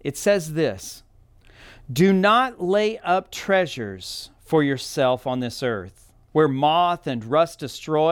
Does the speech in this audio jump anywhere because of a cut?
no; 0 cuts

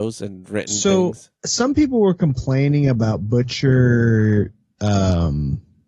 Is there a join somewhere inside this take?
yes; 1 cut; at 1.3 s

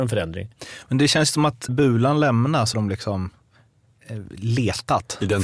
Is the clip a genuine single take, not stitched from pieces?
no; 2 cuts; at 1.7 s, 2.7 s

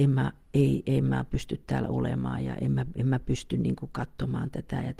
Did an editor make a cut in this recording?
no; 0 cuts

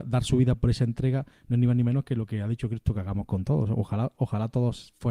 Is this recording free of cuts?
yes; 0 cuts

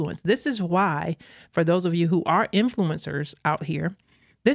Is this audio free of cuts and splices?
yes; 0 cuts

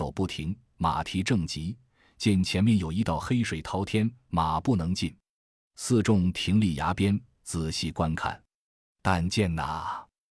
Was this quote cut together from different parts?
no; 0 cuts

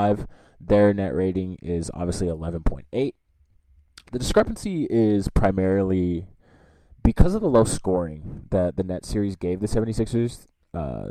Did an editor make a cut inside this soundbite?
no; 0 cuts

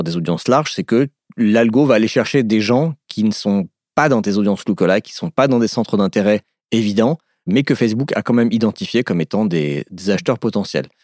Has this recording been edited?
no; 0 cuts

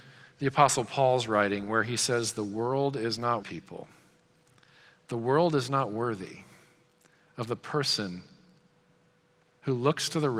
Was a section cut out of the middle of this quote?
yes; 1 cut; at 3.4 s

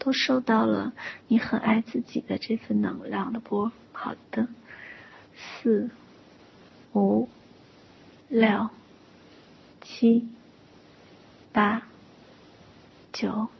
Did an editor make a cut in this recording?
no; 0 cuts

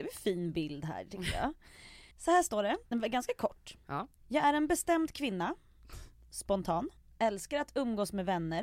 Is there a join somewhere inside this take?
yes; 4 cuts; at 2.1 s, 2.9 s, 4.2 s, 7.0 s

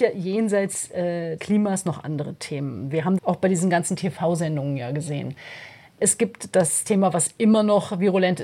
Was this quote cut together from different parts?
yes; 2 cuts; at 1.4 s, 3.2 s

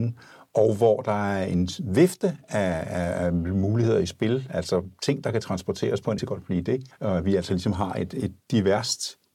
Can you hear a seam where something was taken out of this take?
yes; 2 cuts; at 6.2 s, 6.9 s

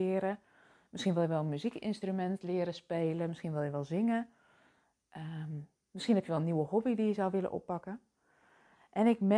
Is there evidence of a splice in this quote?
no; 0 cuts

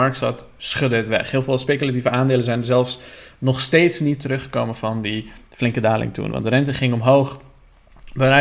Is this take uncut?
yes; 0 cuts

